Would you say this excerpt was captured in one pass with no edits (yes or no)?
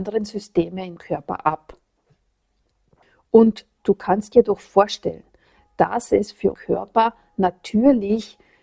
no